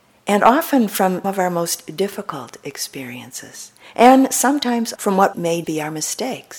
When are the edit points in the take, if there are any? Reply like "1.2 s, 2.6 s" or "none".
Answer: 1.2 s, 5.0 s, 5.3 s, 5.6 s